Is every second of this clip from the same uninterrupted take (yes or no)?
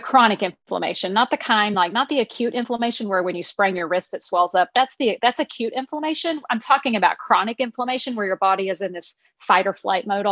yes